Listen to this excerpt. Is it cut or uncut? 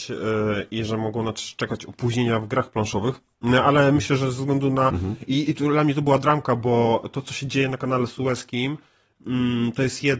uncut